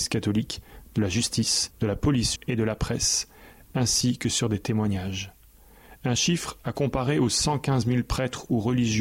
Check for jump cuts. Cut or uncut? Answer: cut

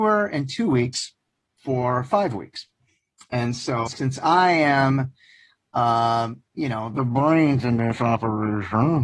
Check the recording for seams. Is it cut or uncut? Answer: cut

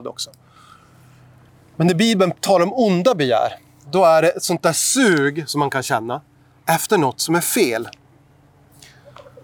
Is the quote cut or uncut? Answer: uncut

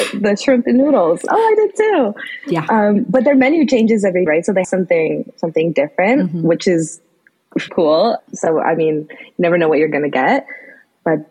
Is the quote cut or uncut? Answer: cut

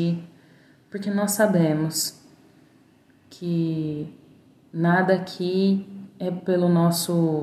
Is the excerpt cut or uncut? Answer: uncut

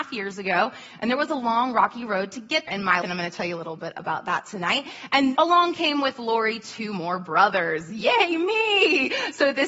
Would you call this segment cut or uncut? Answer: cut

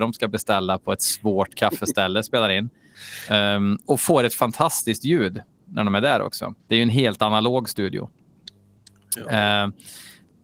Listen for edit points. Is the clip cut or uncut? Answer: cut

